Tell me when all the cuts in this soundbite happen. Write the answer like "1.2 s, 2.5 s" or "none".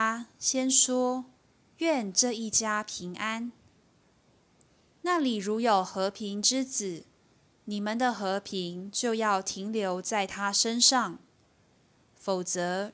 none